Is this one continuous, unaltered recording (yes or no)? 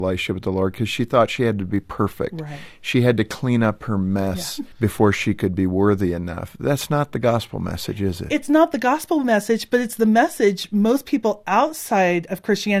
no